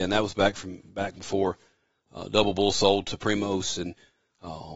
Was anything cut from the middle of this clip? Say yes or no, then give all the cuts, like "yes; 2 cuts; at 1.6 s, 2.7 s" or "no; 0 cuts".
no; 0 cuts